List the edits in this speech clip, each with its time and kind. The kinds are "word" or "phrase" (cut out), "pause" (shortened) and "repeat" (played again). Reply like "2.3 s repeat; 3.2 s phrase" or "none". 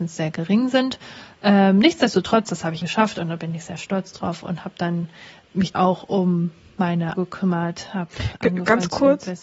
2.8 s word; 5.7 s word; 7.1 s word